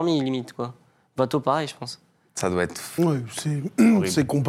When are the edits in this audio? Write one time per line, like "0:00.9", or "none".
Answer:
none